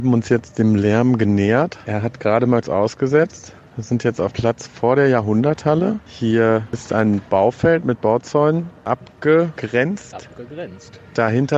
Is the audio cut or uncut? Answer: cut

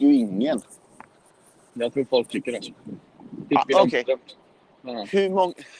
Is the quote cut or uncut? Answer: uncut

